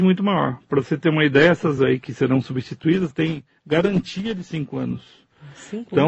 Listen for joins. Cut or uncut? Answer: cut